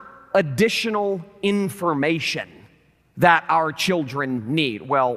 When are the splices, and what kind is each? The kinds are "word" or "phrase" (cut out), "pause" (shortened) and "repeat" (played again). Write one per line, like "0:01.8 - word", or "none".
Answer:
none